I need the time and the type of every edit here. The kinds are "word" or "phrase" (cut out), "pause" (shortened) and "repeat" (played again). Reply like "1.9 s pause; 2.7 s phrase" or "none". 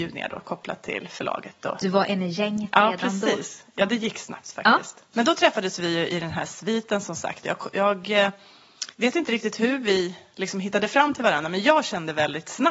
8.9 s pause